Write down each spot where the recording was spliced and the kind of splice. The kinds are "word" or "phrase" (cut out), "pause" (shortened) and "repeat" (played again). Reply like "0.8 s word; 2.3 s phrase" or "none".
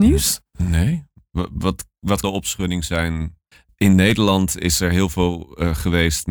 2.2 s word; 3.5 s pause